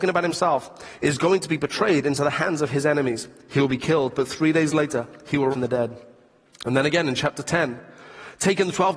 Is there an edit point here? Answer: yes; 1 cut; at 5.5 s

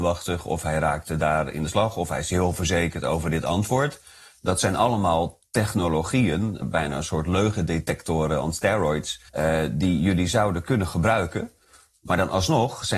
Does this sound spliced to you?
yes; 2 cuts; at 6.6 s, 9.3 s

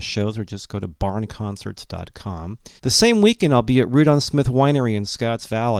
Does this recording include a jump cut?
yes; 1 cut; at 2.8 s

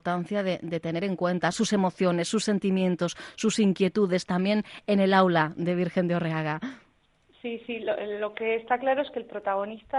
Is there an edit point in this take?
no; 0 cuts

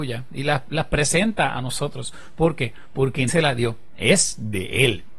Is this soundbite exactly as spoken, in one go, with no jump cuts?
no; 1 cut; at 3.3 s

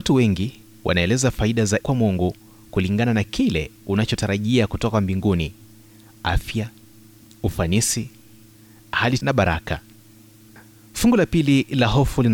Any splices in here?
yes; 2 cuts; at 1.8 s, 9.2 s

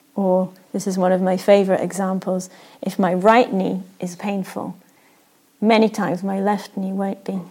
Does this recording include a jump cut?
no; 0 cuts

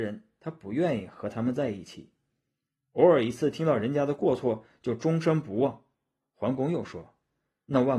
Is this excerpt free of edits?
no; 1 cut; at 5.9 s

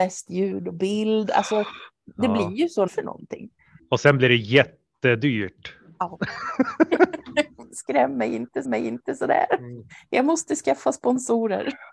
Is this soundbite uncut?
no; 3 cuts; at 2.9 s, 3.8 s, 8.6 s

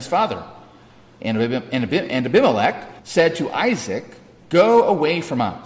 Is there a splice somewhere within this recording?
yes; 1 cut; at 3.0 s

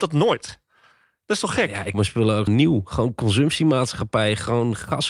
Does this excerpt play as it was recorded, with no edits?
no; 2 cuts; at 1.9 s, 2.5 s

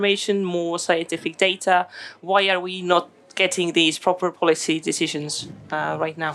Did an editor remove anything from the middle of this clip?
no; 0 cuts

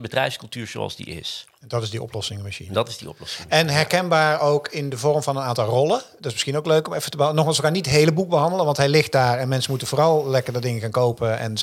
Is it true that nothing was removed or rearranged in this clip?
yes; 0 cuts

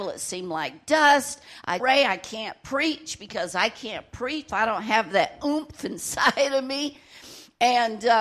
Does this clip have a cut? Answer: yes; 2 cuts; at 1.8 s, 4.5 s

